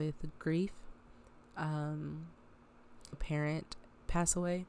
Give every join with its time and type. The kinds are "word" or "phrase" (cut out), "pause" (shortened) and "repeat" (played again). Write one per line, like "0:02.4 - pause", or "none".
0:03.1 - word